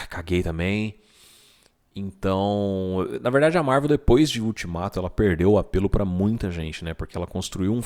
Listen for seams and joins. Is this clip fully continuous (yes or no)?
yes